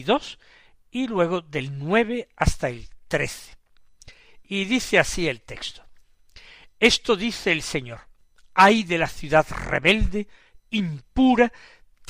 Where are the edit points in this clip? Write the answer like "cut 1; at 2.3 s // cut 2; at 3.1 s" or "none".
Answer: none